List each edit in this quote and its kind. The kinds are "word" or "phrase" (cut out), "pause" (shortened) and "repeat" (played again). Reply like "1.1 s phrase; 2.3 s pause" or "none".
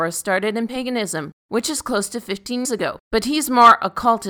1.4 s pause; 2.6 s word; 3.0 s pause